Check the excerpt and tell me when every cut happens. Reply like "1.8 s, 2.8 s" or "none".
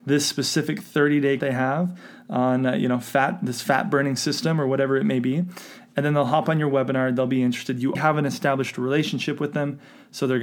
1.4 s, 7.9 s